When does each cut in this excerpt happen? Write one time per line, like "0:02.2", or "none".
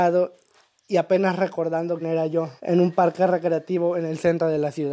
0:02.0
0:02.6